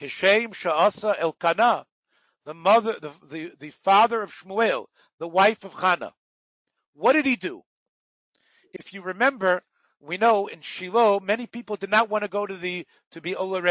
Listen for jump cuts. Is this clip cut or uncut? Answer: uncut